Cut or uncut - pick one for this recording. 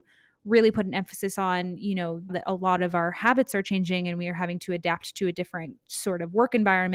cut